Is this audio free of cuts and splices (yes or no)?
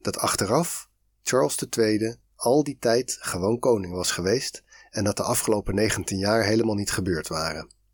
yes